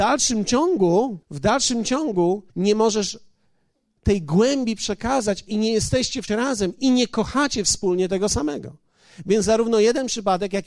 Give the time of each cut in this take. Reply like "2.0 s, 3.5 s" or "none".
1.2 s, 2.5 s, 6.3 s